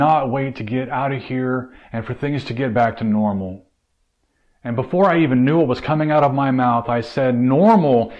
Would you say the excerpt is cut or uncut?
uncut